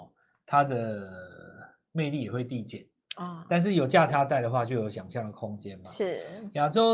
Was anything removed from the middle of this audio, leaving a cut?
no; 0 cuts

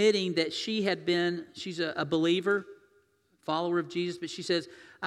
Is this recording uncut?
yes; 0 cuts

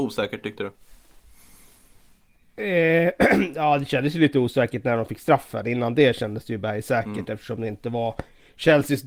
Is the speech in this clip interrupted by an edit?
no; 0 cuts

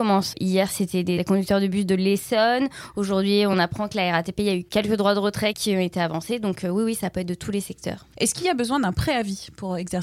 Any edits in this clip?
no; 0 cuts

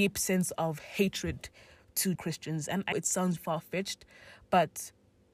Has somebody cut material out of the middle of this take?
yes; 3 cuts; at 2.2 s, 2.9 s, 3.4 s

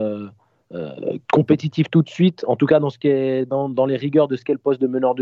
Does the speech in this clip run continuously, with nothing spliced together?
no; 1 cut; at 1.2 s

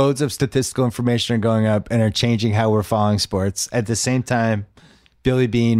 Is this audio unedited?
yes; 0 cuts

